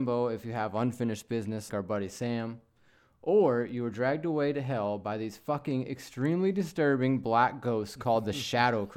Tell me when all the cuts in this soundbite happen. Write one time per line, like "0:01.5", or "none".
0:01.7